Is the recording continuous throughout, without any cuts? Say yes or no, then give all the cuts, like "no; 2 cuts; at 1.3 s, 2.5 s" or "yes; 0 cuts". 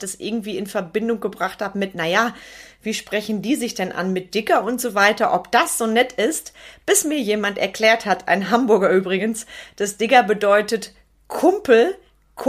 yes; 0 cuts